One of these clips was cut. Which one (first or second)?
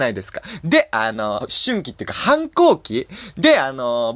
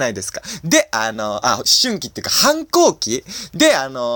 first